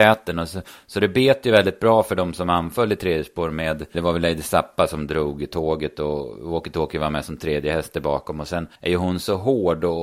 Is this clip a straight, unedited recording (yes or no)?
no